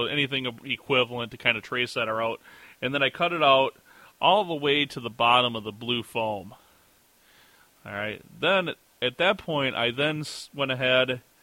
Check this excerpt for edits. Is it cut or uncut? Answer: uncut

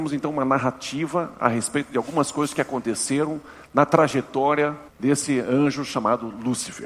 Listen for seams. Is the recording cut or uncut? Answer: cut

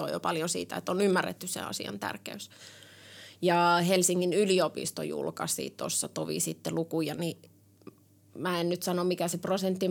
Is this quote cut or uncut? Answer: uncut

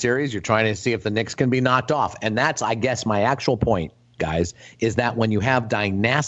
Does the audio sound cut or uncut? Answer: uncut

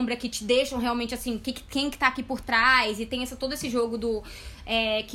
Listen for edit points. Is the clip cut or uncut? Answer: uncut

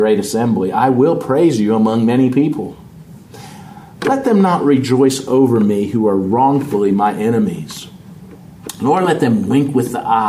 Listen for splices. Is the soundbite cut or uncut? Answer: uncut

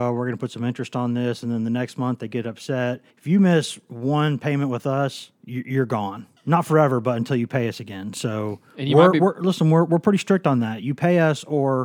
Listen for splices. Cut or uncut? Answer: cut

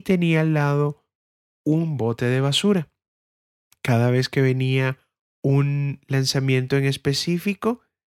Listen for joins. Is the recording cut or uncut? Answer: uncut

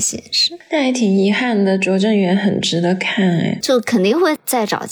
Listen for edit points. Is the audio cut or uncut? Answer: cut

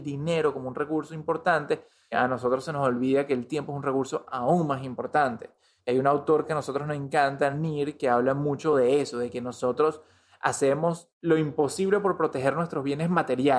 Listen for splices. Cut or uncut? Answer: uncut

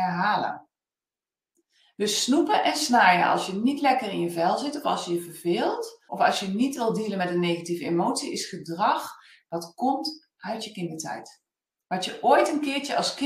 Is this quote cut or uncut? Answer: cut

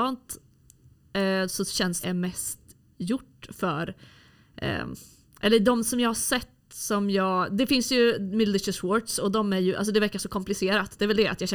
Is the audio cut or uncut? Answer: cut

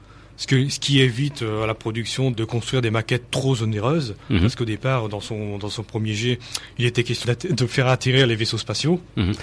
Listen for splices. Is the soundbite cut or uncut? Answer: cut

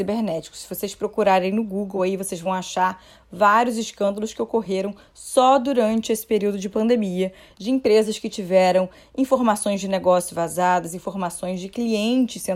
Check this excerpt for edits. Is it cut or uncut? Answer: uncut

